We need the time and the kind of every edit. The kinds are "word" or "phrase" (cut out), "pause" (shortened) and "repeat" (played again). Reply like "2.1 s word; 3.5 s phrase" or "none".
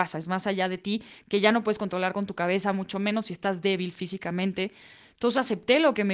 none